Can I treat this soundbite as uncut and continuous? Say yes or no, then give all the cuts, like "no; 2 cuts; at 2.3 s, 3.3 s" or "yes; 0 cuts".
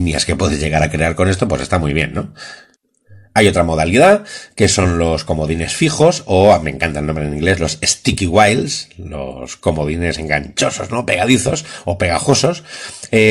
yes; 0 cuts